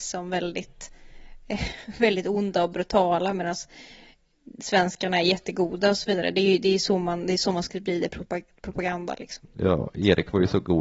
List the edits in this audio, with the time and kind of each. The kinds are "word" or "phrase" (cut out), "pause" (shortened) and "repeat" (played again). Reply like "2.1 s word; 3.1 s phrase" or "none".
none